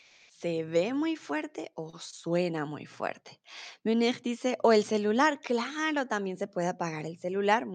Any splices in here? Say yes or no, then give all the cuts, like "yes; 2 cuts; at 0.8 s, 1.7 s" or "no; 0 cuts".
no; 0 cuts